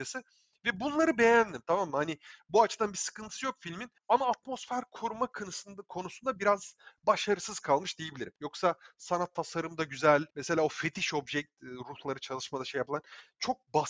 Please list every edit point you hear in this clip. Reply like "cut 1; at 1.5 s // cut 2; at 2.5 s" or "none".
cut 1; at 4.0 s // cut 2; at 8.4 s // cut 3; at 10.3 s